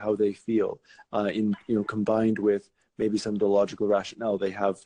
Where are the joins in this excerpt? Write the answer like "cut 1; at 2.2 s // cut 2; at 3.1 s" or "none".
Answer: none